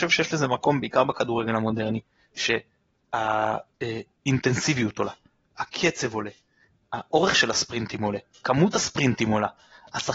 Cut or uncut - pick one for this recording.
uncut